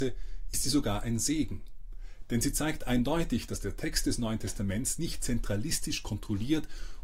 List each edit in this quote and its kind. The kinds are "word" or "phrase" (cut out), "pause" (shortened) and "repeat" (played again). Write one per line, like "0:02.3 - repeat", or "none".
none